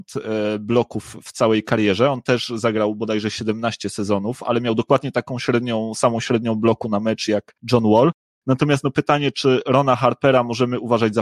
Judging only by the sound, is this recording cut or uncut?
uncut